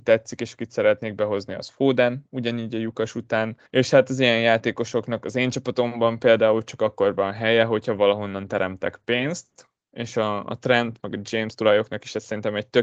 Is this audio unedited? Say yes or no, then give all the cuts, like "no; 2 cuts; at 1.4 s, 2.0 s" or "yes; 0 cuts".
no; 1 cut; at 3.7 s